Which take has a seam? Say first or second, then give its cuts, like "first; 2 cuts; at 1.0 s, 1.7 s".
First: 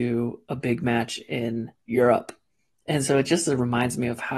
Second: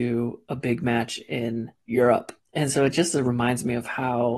second; 1 cut; at 2.4 s